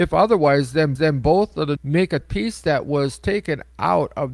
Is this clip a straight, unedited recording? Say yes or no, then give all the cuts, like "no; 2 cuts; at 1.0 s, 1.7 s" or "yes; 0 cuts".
no; 3 cuts; at 1.0 s, 1.8 s, 2.2 s